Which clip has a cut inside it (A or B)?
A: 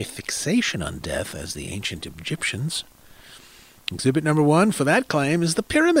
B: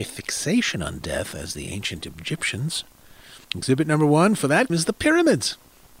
B